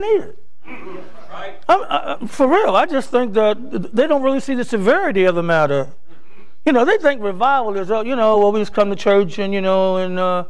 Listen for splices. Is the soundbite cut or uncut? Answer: uncut